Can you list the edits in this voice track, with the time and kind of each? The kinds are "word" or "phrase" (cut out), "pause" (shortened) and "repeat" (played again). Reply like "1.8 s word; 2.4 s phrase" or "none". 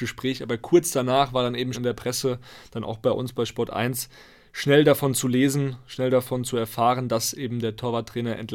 1.7 s word